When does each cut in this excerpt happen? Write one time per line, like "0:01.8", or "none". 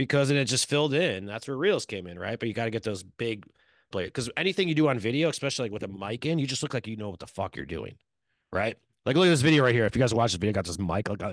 0:03.9